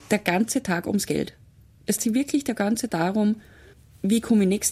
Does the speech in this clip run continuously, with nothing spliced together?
no; 2 cuts; at 2.0 s, 2.9 s

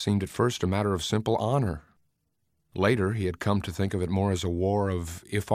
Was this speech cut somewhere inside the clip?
no; 0 cuts

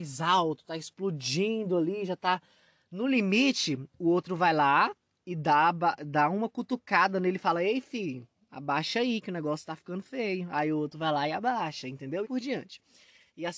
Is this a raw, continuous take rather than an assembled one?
no; 1 cut; at 12.2 s

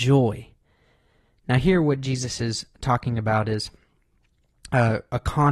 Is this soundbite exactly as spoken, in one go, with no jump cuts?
yes; 0 cuts

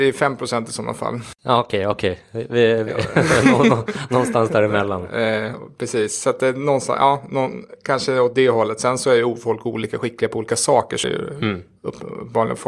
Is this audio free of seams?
no; 3 cuts; at 1.4 s, 8.3 s, 11.0 s

